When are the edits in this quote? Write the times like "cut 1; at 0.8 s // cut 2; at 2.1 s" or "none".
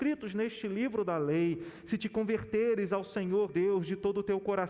cut 1; at 3.5 s